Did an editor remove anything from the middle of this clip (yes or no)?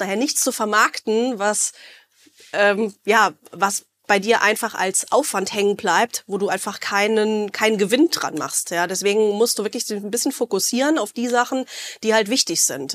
no